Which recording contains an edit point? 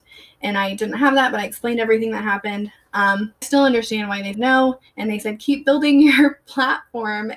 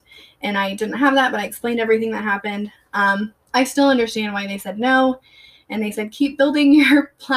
first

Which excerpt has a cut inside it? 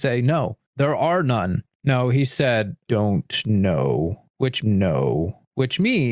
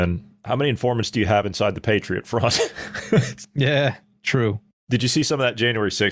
first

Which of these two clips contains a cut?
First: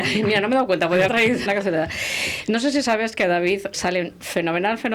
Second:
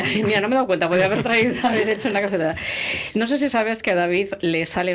first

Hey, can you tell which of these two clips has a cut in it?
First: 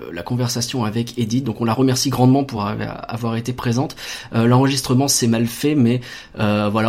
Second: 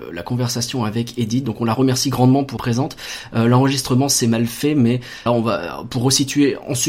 second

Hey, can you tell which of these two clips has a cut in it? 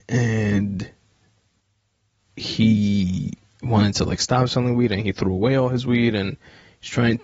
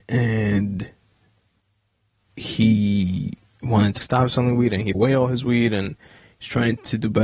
second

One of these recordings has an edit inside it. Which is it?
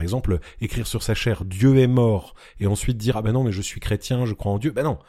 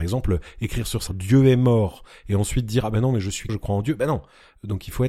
second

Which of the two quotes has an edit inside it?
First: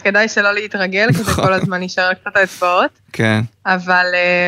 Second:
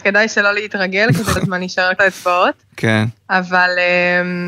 second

